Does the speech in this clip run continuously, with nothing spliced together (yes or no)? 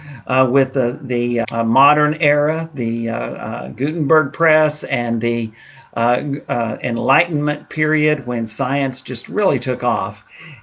no